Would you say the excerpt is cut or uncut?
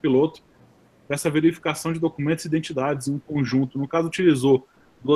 uncut